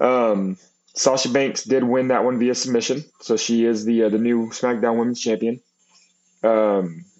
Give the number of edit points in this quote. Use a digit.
1